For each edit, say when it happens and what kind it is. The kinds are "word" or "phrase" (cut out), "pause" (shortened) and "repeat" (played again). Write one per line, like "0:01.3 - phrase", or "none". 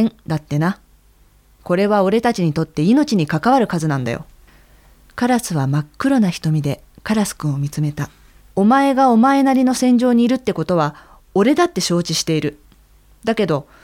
0:04.5 - pause
0:08.4 - pause

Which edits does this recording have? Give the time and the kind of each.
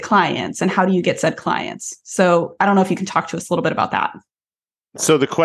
none

